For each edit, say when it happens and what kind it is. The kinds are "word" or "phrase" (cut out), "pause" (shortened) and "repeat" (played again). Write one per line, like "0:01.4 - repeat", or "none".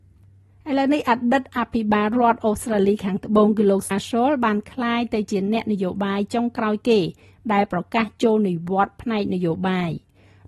0:03.9 - word